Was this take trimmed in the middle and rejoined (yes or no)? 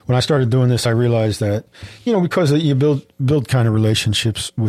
no